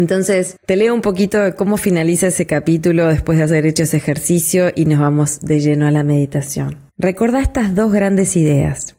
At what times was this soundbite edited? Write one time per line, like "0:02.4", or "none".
none